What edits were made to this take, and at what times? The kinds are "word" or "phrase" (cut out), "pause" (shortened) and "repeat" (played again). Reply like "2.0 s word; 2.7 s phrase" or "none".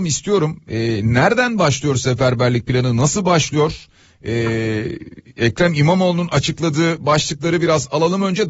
none